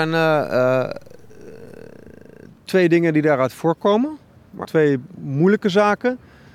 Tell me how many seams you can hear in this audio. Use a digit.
1